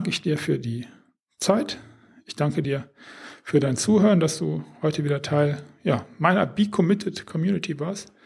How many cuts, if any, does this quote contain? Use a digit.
0